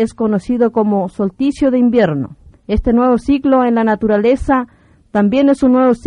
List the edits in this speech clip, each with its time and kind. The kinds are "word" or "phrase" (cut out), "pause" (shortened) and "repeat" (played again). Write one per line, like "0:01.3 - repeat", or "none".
0:02.5 - pause